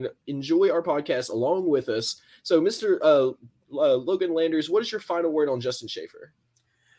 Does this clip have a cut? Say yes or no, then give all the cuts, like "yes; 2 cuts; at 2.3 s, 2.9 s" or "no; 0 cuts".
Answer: no; 0 cuts